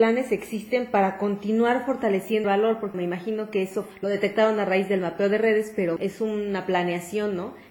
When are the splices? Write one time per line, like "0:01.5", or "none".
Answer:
0:02.4
0:02.9
0:06.0